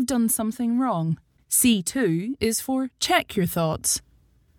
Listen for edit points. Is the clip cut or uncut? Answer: cut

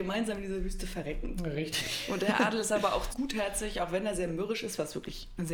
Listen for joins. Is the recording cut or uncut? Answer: cut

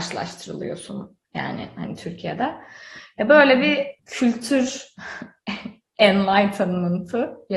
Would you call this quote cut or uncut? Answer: cut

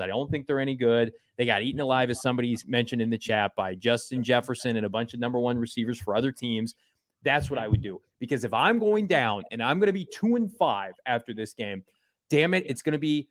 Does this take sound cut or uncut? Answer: uncut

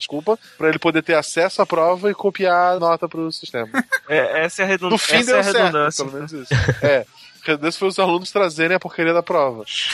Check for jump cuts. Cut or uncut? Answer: cut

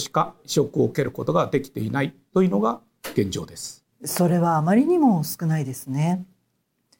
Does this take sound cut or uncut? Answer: cut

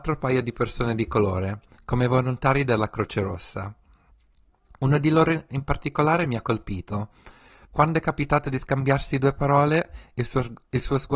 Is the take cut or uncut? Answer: uncut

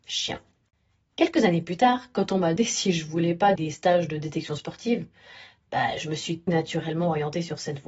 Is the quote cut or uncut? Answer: cut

